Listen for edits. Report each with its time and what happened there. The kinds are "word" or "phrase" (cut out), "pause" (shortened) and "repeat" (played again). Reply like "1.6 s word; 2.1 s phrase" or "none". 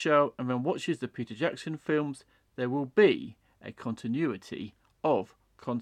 none

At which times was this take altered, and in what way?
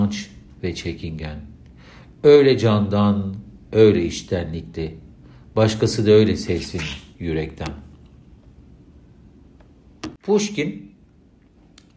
none

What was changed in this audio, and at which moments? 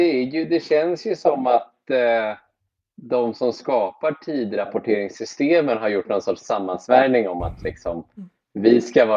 none

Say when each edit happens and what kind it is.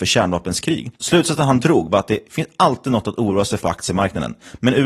3.6 s phrase

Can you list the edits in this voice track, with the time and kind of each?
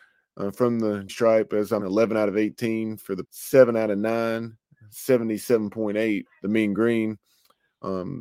1.1 s word; 1.8 s word; 3.2 s word; 6.3 s word

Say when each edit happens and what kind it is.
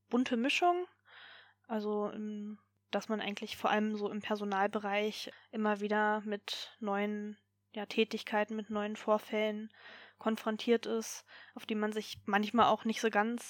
none

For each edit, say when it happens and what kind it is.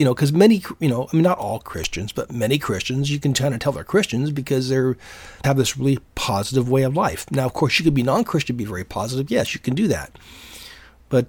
5.4 s word

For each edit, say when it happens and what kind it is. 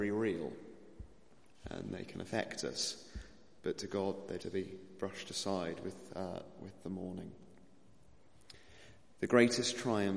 3.6 s pause; 4.4 s word

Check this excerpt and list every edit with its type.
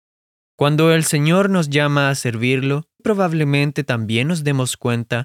3.0 s word

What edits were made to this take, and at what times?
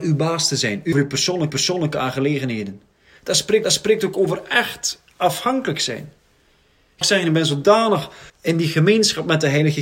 0.9 s phrase; 1.5 s repeat; 3.6 s repeat; 7.0 s word; 8.3 s pause

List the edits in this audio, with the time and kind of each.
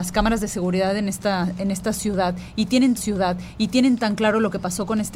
3.0 s repeat

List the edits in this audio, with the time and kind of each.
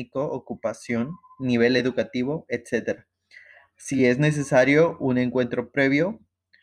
none

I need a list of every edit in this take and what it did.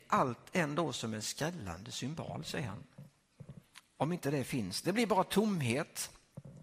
none

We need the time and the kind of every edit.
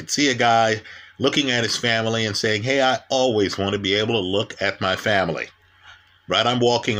none

